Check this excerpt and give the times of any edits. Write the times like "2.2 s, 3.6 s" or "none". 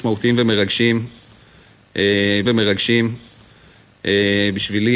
2.5 s